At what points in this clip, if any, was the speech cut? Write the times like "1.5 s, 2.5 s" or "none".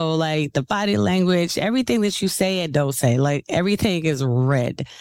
none